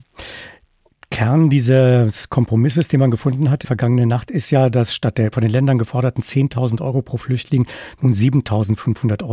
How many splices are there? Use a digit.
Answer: 2